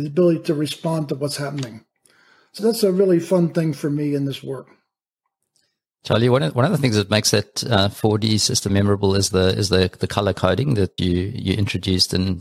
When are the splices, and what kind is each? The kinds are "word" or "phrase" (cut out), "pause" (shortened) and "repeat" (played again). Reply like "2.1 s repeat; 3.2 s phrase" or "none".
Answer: 2.6 s word; 8.7 s word; 11.0 s word